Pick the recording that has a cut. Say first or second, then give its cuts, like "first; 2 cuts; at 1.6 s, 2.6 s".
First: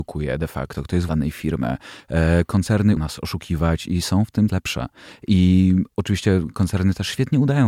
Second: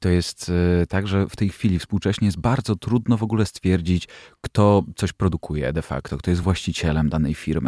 first; 3 cuts; at 1.1 s, 3.0 s, 4.5 s